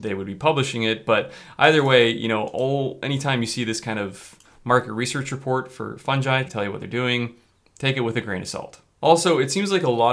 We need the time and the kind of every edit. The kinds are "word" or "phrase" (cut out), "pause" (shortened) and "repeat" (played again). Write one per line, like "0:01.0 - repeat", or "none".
0:06.4 - word